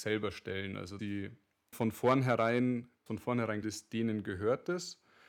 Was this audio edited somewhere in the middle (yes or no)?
yes